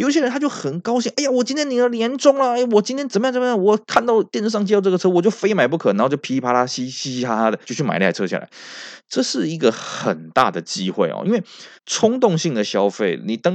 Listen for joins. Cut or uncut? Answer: cut